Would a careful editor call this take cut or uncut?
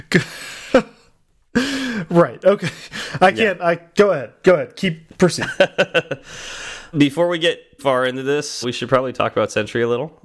cut